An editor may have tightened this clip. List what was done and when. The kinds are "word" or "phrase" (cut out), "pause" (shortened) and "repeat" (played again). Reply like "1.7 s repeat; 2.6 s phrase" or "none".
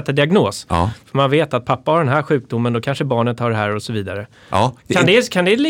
4.8 s pause